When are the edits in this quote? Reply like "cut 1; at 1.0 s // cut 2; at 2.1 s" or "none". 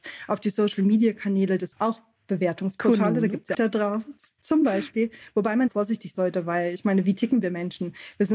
cut 1; at 1.7 s // cut 2; at 3.5 s // cut 3; at 5.7 s // cut 4; at 6.1 s